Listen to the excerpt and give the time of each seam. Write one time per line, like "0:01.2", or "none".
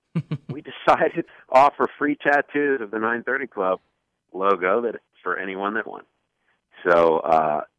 0:01.3
0:05.8